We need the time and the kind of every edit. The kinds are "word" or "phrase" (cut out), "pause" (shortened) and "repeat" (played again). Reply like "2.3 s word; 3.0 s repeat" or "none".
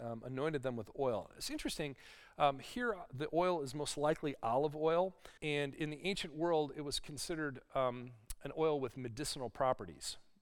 5.4 s pause